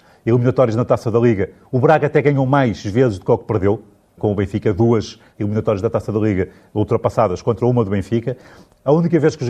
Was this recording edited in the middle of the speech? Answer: no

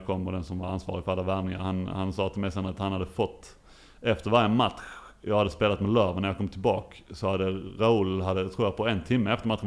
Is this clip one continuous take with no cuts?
yes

